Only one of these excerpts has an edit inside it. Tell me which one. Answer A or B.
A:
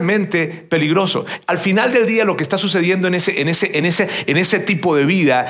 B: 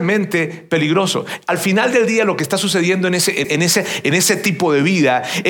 B